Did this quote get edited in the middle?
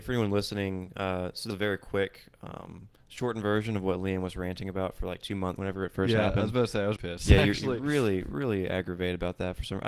yes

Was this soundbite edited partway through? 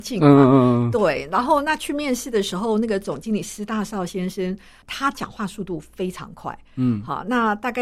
yes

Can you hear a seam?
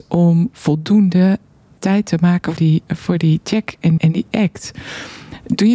yes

